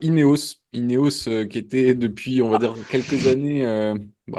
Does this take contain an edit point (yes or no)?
no